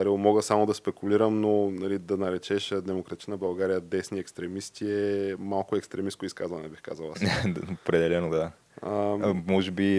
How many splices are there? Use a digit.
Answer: 0